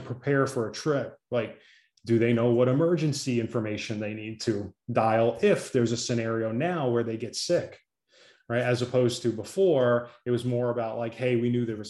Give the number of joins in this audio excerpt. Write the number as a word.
zero